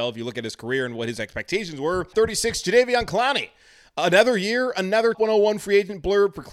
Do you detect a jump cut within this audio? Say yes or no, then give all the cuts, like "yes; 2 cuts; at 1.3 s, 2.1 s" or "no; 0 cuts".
yes; 2 cuts; at 2.1 s, 5.1 s